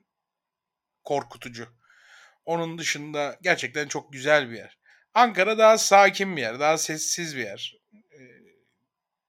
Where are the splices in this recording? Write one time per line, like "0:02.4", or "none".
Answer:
0:04.9